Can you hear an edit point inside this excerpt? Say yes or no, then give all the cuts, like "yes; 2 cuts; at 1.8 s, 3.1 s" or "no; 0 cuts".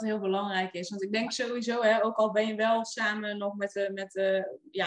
no; 0 cuts